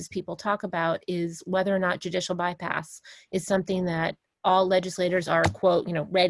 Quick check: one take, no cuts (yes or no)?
yes